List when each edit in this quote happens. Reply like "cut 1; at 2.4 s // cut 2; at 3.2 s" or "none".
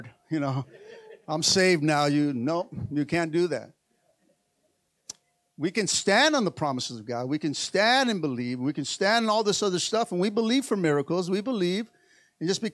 none